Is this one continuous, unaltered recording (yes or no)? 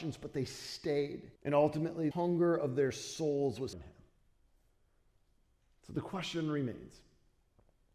no